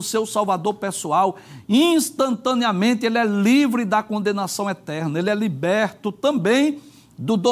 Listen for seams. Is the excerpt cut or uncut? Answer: uncut